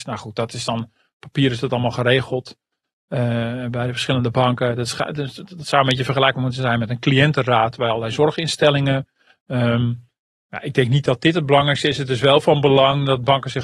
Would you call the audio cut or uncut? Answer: uncut